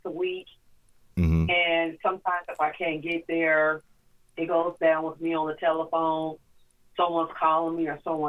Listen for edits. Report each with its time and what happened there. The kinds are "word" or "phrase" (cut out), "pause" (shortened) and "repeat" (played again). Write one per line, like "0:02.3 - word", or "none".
none